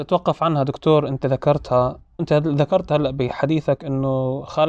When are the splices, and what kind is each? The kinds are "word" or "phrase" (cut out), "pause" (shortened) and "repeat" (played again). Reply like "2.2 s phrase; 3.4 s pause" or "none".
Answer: 2.2 s word